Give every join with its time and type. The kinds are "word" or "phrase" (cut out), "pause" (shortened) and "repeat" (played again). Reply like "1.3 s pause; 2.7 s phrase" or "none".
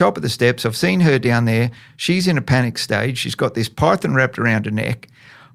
none